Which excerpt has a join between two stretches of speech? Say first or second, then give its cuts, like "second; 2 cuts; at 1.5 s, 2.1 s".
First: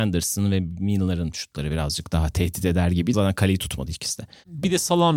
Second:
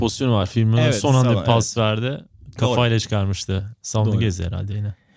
first; 1 cut; at 3.1 s